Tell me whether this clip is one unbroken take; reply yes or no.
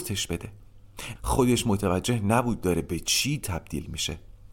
no